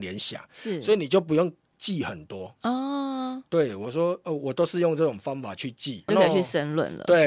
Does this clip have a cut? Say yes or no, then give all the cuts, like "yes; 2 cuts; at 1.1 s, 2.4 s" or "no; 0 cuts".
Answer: yes; 1 cut; at 6.1 s